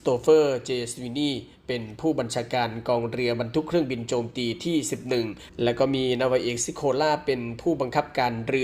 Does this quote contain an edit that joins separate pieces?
no; 0 cuts

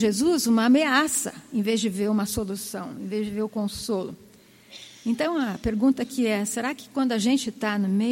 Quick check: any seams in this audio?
no; 0 cuts

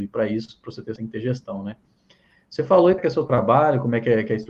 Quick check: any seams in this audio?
yes; 2 cuts; at 1.0 s, 3.0 s

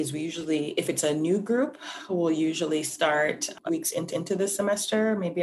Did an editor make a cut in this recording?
yes; 2 cuts; at 3.7 s, 4.1 s

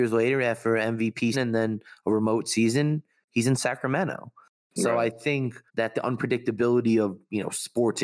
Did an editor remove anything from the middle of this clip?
yes; 2 cuts; at 1.3 s, 5.7 s

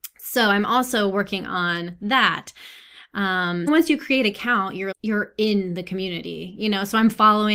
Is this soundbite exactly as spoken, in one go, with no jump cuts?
no; 2 cuts; at 3.7 s, 4.9 s

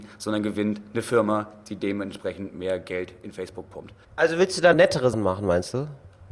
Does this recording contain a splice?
yes; 3 cuts; at 4.0 s, 4.7 s, 5.1 s

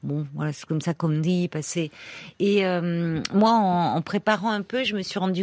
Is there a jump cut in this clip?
no; 0 cuts

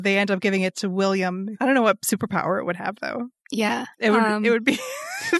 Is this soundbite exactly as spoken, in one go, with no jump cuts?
yes; 0 cuts

